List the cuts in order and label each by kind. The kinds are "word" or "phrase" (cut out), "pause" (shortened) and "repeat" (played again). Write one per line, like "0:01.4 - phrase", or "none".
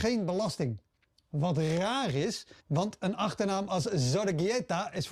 0:02.6 - pause